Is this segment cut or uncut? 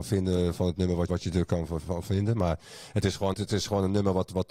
cut